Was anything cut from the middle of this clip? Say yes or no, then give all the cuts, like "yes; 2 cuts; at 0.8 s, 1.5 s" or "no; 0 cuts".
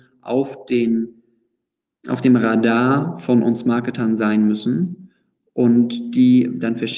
no; 0 cuts